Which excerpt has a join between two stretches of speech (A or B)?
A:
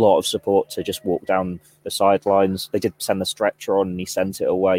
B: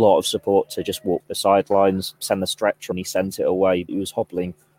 B